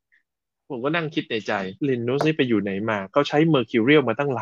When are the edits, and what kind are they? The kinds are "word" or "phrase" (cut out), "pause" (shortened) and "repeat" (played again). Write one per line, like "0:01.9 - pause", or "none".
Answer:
0:01.8 - pause